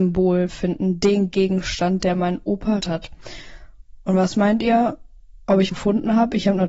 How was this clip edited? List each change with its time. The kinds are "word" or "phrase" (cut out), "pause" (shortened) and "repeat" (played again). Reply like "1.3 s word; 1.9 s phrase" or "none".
2.8 s word; 5.7 s word